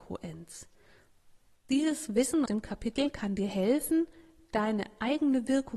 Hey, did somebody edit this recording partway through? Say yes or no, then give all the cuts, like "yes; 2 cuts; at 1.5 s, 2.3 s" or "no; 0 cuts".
yes; 1 cut; at 2.5 s